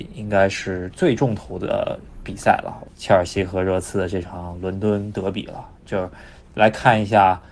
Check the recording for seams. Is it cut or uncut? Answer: uncut